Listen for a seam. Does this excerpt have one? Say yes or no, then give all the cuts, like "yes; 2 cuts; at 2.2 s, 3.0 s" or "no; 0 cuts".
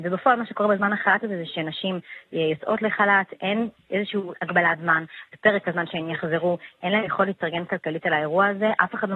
no; 0 cuts